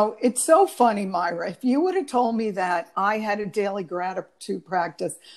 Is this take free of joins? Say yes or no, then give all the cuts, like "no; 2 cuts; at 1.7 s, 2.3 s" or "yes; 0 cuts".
yes; 0 cuts